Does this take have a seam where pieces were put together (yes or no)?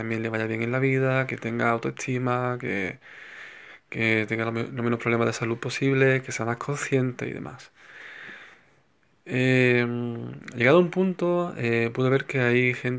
no